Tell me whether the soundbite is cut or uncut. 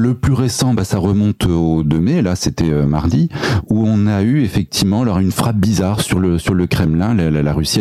uncut